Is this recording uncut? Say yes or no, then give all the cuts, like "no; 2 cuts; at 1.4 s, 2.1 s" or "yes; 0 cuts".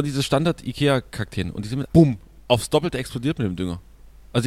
no; 1 cut; at 1.9 s